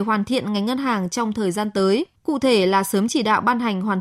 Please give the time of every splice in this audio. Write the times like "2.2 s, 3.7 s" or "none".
2.2 s